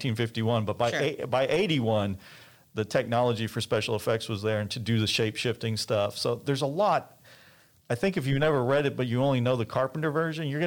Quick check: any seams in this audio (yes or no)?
no